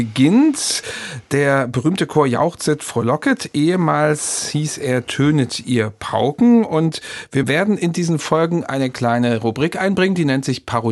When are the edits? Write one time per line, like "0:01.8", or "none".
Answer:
none